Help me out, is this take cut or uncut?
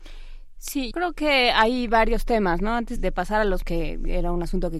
cut